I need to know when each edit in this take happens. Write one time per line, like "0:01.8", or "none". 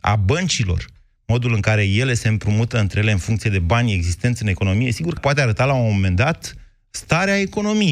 0:05.2